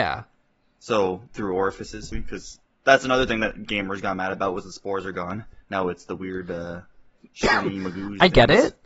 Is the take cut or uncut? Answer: cut